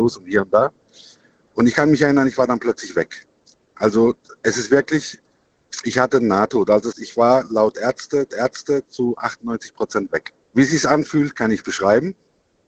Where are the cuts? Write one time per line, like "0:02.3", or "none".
0:06.9
0:08.3
0:10.4